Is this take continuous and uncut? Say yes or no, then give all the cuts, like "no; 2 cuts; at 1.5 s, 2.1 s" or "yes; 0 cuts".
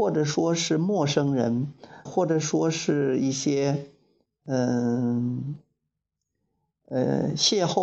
no; 1 cut; at 2.1 s